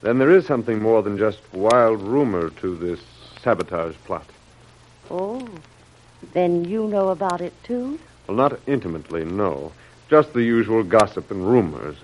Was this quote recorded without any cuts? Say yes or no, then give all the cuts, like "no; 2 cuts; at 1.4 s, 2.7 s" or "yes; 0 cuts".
yes; 0 cuts